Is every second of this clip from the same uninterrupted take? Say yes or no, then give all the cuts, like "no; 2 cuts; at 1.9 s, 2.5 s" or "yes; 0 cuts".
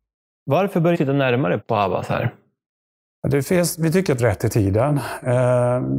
no; 3 cuts; at 0.9 s, 1.6 s, 4.2 s